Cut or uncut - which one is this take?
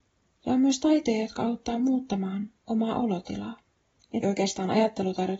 cut